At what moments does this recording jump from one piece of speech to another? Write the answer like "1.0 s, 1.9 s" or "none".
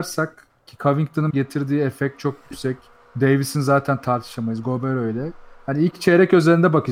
1.3 s, 3.0 s